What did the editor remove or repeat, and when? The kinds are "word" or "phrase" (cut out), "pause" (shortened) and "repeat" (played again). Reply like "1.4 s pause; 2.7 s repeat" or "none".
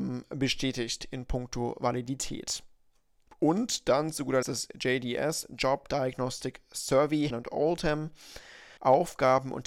4.4 s word; 7.3 s word; 8.8 s pause